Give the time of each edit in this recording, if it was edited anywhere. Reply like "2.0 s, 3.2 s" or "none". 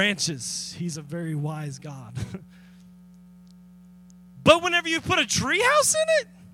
none